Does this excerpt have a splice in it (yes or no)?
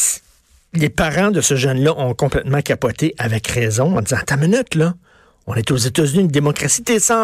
no